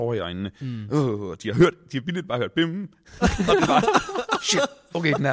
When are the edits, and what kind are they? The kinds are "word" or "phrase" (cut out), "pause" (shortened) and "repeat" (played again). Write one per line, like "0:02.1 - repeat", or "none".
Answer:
none